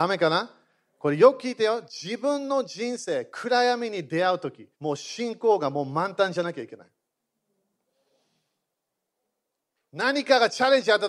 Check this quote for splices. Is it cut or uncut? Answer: cut